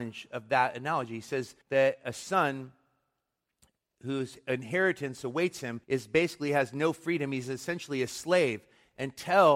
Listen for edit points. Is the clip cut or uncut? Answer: cut